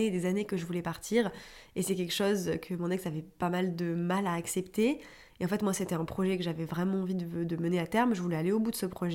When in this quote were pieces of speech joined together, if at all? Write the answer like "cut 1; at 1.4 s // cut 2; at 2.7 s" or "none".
none